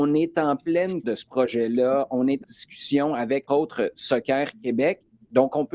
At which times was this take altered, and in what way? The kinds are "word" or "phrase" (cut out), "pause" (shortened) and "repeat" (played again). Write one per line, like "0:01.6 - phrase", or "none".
0:01.0 - word
0:02.4 - word
0:03.5 - word